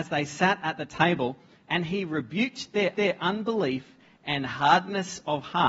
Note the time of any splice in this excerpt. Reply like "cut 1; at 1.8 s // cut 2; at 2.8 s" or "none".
cut 1; at 2.9 s